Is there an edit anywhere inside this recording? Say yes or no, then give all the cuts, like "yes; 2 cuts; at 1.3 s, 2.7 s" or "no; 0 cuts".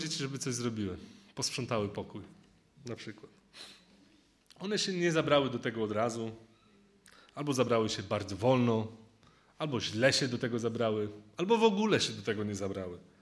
no; 0 cuts